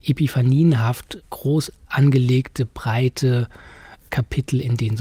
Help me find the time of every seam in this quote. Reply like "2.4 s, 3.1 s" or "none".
none